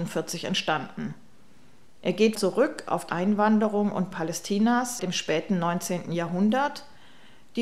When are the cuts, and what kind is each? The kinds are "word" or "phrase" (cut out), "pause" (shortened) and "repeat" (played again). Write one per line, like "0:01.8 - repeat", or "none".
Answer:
0:02.3 - word
0:03.1 - word
0:04.1 - word
0:05.0 - word